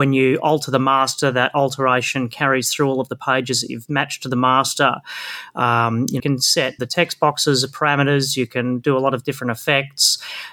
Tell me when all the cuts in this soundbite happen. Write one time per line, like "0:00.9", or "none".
0:06.2
0:06.8